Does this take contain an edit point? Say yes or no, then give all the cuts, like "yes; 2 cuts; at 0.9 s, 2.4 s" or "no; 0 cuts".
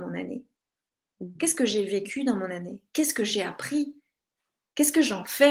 no; 0 cuts